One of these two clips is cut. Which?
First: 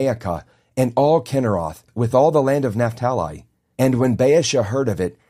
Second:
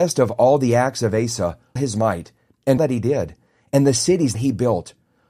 second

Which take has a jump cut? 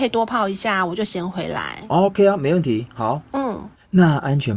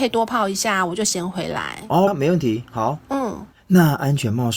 second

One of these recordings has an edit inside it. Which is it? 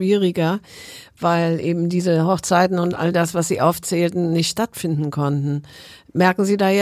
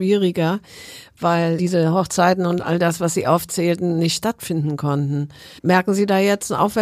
second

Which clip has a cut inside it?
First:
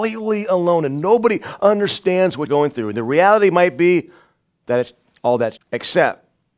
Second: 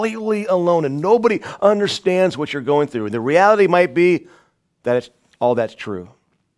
first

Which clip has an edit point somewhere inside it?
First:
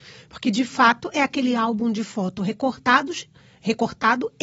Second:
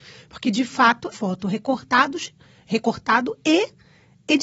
second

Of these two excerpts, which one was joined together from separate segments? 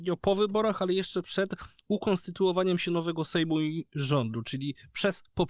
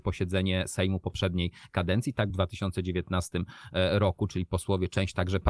second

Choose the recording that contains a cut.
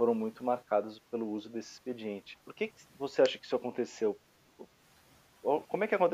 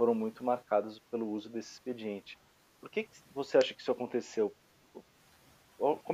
first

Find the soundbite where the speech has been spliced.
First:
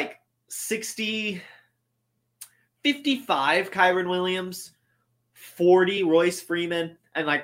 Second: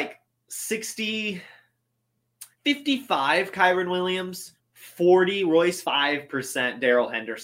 second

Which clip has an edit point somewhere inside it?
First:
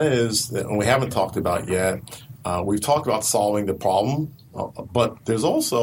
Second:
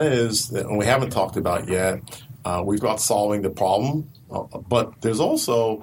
second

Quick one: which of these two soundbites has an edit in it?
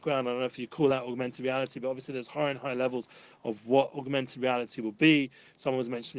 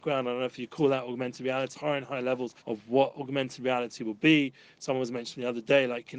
second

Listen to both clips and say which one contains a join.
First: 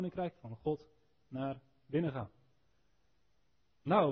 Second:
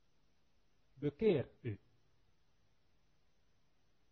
second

